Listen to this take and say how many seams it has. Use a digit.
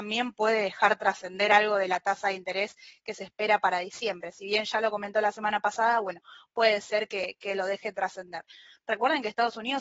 0